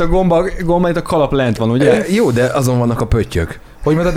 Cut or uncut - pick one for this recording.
uncut